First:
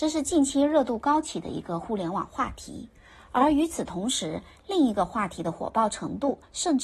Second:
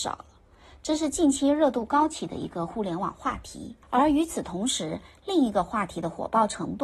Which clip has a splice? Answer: second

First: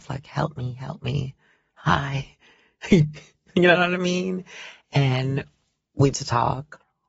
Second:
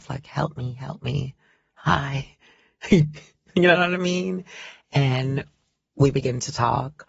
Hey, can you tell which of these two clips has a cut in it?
first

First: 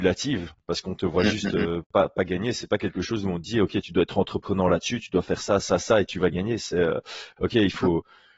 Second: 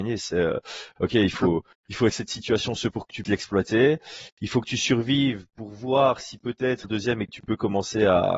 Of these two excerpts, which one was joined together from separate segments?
second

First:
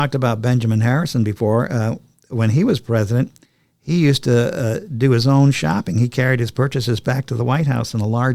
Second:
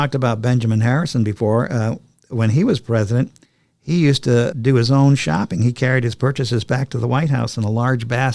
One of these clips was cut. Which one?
second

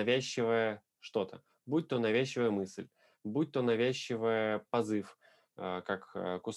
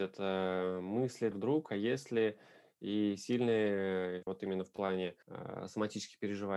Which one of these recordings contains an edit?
second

